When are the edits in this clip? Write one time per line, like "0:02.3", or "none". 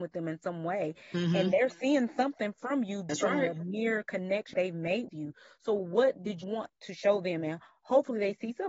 0:03.1
0:04.5
0:05.1
0:06.4